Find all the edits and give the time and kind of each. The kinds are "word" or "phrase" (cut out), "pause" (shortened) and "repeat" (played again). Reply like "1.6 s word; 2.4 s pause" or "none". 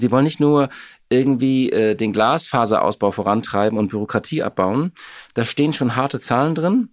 none